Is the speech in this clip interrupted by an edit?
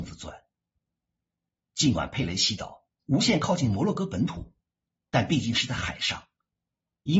no; 0 cuts

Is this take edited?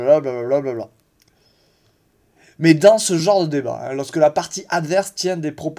no; 0 cuts

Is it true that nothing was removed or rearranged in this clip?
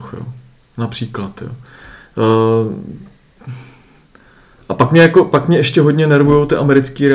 yes; 0 cuts

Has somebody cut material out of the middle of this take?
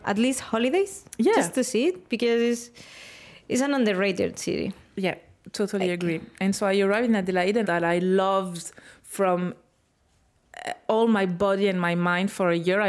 yes; 1 cut; at 7.6 s

